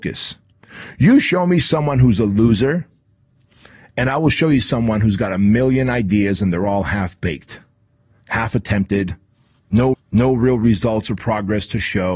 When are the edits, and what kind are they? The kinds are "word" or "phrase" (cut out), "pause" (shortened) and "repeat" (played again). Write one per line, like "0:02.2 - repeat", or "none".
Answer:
0:09.9 - repeat